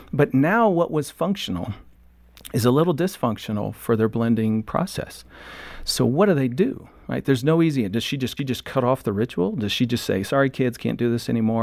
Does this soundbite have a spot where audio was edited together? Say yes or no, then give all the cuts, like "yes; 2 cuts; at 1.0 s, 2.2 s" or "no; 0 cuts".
yes; 1 cut; at 8.4 s